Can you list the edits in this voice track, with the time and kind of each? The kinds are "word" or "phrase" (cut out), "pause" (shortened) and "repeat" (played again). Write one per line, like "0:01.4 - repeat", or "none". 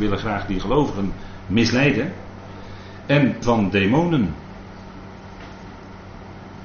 0:03.4 - word